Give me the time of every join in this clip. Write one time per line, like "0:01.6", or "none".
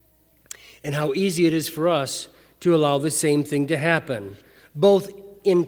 none